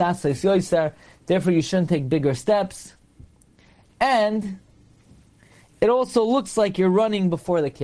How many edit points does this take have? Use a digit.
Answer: 0